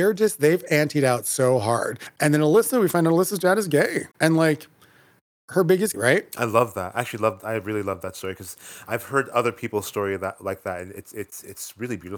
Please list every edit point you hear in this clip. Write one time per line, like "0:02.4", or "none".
0:04.1
0:05.9